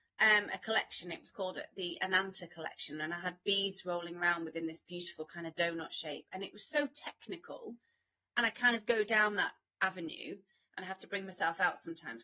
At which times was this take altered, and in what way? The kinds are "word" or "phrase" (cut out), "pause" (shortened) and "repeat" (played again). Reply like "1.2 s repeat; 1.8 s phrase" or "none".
none